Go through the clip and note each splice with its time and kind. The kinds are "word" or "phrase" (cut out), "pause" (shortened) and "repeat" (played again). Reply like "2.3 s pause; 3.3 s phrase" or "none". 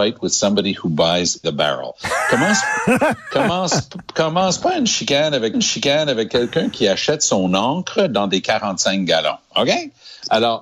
1.4 s phrase; 3.0 s word; 5.5 s repeat